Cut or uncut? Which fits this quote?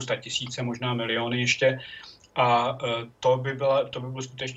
cut